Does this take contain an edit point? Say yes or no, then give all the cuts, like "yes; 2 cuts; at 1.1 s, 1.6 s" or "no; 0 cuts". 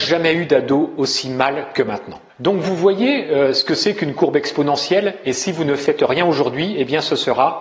yes; 1 cut; at 2.3 s